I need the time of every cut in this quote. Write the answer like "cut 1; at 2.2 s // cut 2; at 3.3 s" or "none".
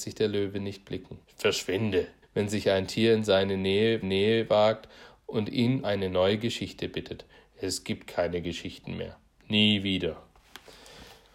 cut 1; at 1.2 s // cut 2; at 2.2 s // cut 3; at 4.0 s // cut 4; at 5.8 s

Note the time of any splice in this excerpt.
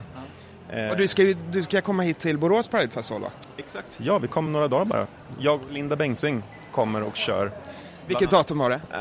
cut 1; at 4.5 s

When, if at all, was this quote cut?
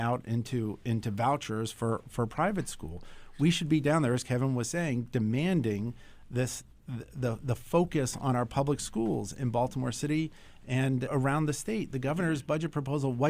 cut 1; at 11.1 s

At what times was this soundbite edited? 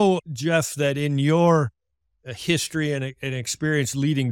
none

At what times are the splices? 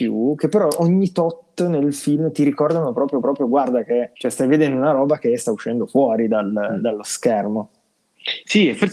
cut 1; at 3.2 s // cut 2; at 4.2 s

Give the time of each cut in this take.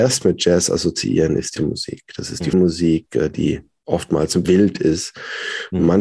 cut 1; at 1.6 s // cut 2; at 2.5 s // cut 3; at 4.4 s

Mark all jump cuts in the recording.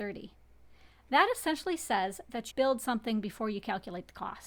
cut 1; at 2.5 s

